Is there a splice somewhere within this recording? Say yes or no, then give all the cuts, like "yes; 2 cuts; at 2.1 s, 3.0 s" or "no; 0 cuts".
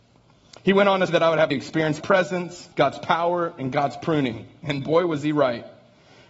yes; 4 cuts; at 1.1 s, 1.5 s, 2.0 s, 2.7 s